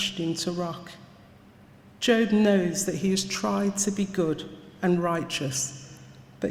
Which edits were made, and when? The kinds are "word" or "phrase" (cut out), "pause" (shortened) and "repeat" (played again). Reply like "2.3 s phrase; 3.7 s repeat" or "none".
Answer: none